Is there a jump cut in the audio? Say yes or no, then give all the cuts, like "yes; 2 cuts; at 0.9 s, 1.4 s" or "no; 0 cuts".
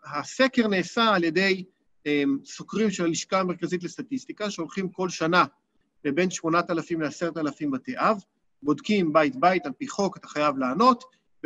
no; 0 cuts